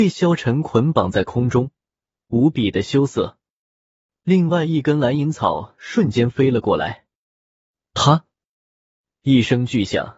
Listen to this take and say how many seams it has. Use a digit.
0